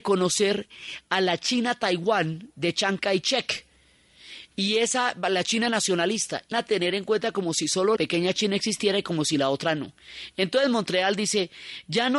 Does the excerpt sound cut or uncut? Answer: cut